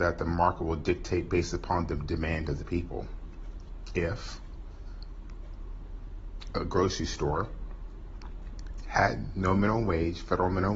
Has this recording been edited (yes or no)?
no